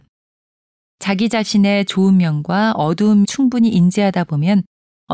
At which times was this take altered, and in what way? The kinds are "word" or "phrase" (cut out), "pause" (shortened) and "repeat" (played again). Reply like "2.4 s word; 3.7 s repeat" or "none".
3.2 s phrase